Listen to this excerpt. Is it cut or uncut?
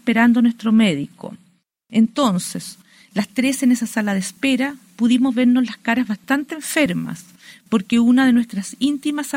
uncut